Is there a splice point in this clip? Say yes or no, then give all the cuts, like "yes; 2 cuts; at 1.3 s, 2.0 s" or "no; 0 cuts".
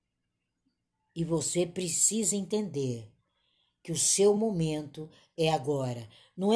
no; 0 cuts